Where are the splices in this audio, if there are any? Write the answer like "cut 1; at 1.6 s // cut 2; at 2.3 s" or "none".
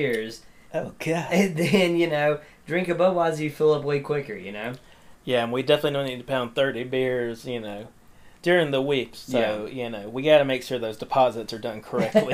cut 1; at 8.4 s // cut 2; at 9.1 s